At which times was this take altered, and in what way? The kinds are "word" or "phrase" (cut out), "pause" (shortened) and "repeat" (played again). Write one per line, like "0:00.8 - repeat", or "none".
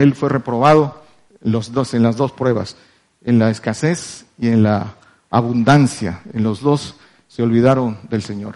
0:01.3 - word